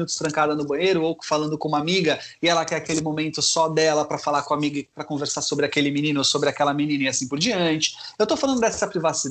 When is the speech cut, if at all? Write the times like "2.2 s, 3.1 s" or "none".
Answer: none